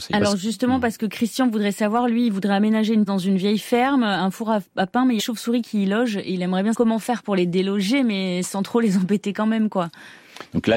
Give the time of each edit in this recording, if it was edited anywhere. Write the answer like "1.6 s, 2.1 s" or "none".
3.1 s, 5.2 s, 6.7 s